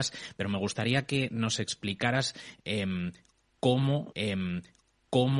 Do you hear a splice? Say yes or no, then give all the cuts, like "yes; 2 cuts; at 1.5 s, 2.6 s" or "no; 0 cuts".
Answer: yes; 1 cut; at 4.1 s